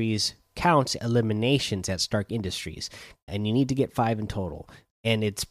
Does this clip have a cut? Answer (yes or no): yes